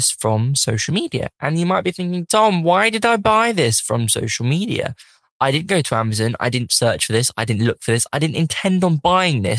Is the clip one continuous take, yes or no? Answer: yes